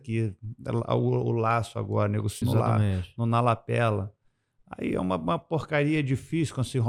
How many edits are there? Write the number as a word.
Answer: one